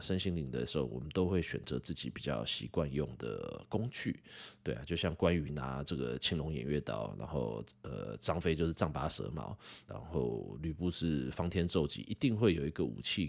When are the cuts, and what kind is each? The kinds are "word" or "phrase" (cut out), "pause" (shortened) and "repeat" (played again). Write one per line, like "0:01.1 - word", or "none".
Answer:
0:09.9 - word